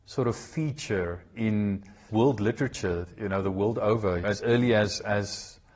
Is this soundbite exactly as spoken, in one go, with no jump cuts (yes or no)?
no